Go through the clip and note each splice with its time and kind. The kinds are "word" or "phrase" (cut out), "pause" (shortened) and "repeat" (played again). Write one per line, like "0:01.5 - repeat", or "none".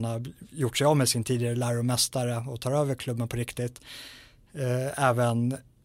none